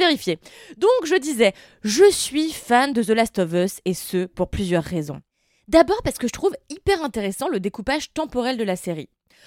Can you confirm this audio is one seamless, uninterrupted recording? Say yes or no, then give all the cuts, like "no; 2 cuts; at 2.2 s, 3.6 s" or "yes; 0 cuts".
yes; 0 cuts